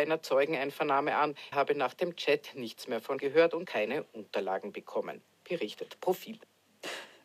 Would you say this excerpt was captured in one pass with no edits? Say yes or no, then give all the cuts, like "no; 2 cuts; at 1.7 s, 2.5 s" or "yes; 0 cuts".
no; 3 cuts; at 1.5 s, 3.2 s, 3.6 s